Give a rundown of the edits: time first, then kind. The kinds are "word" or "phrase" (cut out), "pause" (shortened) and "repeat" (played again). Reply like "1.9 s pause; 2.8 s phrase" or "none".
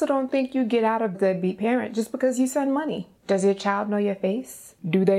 1.1 s phrase; 3.2 s pause

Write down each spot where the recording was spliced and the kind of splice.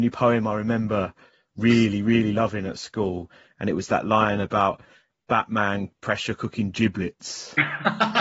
none

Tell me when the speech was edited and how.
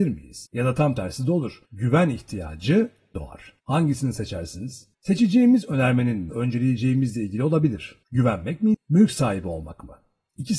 3.1 s word; 3.6 s pause; 4.9 s pause; 6.3 s phrase; 8.0 s pause; 8.7 s word

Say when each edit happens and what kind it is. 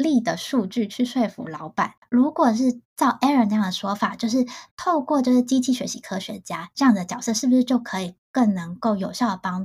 none

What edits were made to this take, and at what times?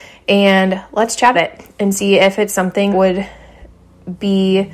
1.3 s word; 2.9 s word

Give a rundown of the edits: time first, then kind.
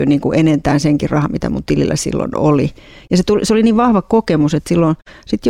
none

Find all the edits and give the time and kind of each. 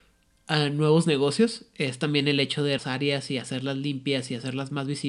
2.8 s phrase

